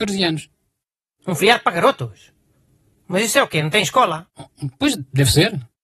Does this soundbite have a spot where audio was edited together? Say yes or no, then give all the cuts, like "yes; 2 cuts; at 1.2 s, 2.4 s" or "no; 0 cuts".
no; 0 cuts